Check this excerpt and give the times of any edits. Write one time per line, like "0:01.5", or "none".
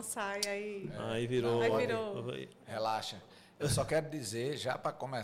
none